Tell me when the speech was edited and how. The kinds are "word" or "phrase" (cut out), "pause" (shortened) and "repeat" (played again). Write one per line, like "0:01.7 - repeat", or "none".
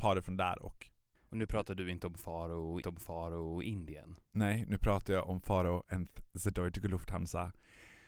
0:01.2 - pause
0:02.8 - repeat

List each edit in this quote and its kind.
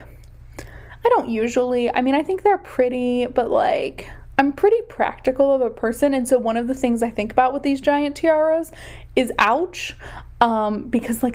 none

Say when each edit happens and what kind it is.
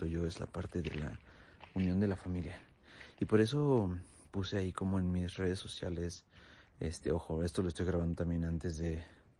none

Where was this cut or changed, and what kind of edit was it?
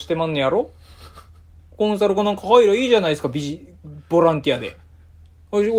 none

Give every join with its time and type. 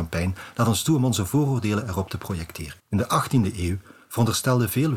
0:02.8 - pause

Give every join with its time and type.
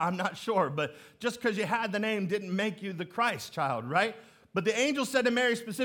none

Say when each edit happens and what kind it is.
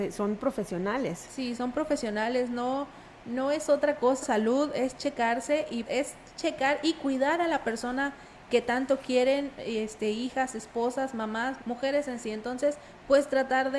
0:04.2 - phrase
0:05.8 - word
0:11.6 - word

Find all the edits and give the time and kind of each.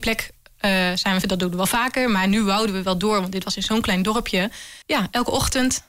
0:01.2 - word
0:04.8 - pause

